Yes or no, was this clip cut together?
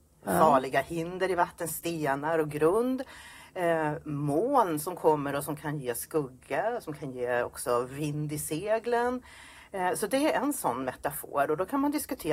no